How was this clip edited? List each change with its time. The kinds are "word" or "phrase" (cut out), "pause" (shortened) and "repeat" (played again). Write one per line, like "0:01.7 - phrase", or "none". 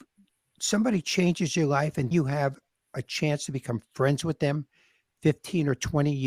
0:02.1 - word